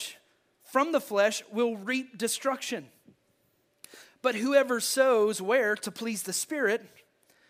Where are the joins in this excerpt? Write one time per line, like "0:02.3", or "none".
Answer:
none